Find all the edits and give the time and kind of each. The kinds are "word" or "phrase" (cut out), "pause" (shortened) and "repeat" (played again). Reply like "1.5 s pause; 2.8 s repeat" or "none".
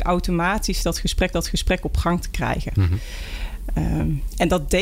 1.3 s repeat